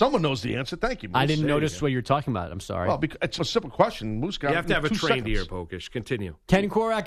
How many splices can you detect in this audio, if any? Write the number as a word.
one